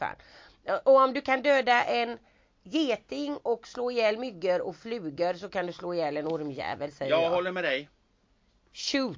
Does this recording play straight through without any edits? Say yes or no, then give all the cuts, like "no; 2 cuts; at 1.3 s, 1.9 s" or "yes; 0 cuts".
yes; 0 cuts